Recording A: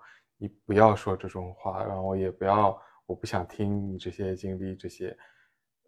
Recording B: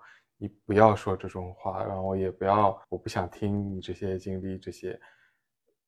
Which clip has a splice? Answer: B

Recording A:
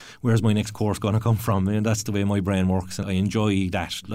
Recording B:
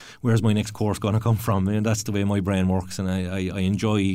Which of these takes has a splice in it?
A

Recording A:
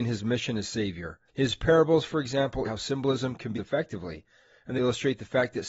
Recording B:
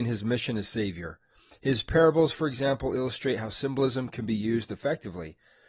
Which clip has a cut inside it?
A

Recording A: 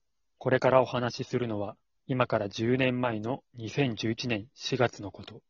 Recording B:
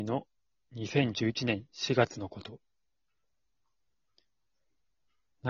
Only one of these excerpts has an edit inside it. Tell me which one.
A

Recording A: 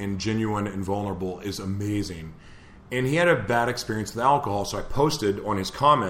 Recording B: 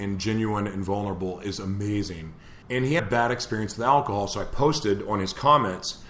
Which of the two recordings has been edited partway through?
B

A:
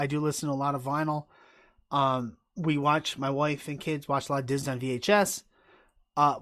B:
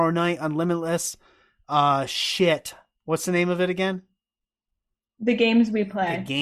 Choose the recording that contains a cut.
A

